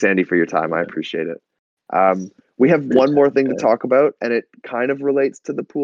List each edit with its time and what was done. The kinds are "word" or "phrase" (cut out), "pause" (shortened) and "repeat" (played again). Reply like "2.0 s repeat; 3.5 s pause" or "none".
none

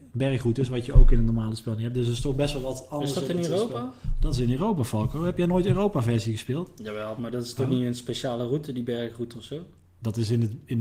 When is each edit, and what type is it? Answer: none

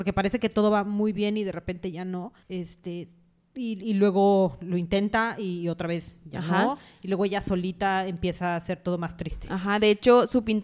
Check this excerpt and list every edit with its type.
2.4 s pause

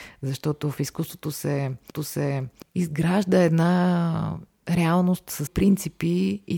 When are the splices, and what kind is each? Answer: 1.9 s repeat; 5.5 s word

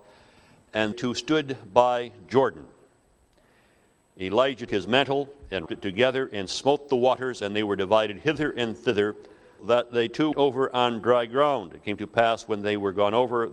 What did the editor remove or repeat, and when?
0.9 s word; 4.7 s word; 5.7 s word; 9.6 s word; 10.3 s word

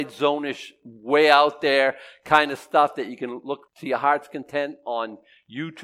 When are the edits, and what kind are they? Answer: 3.7 s pause

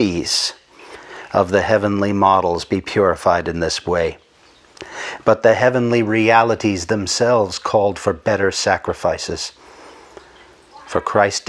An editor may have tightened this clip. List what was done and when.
none

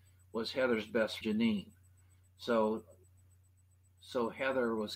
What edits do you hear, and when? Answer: 1.2 s word

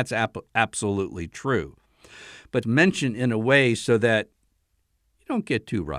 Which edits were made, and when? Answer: 2.6 s phrase

